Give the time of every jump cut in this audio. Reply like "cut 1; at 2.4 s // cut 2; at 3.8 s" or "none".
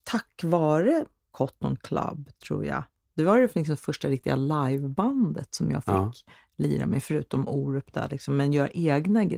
none